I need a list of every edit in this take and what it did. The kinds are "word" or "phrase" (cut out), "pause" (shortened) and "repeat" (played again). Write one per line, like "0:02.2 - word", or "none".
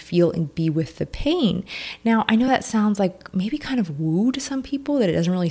none